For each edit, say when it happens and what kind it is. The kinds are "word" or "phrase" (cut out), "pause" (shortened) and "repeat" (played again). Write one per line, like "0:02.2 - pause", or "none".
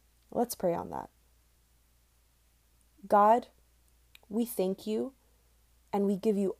none